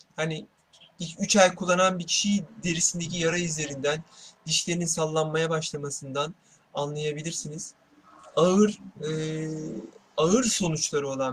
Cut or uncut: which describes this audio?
uncut